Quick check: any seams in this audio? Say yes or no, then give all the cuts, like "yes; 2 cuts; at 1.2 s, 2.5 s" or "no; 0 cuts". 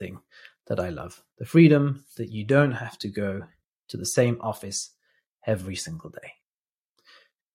no; 0 cuts